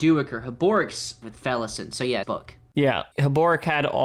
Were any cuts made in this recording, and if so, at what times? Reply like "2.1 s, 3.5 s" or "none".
1.2 s, 2.2 s, 3.1 s

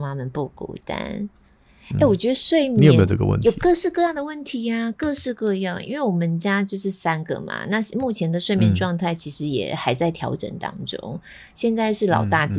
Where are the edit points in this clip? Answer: none

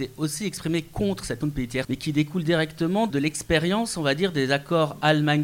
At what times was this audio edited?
1.4 s, 1.8 s, 3.1 s

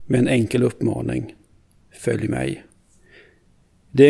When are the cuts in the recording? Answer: none

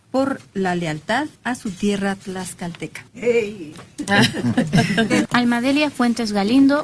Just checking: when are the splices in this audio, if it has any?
1.3 s, 3.1 s

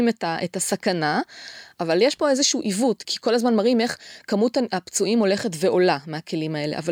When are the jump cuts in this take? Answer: 3.0 s

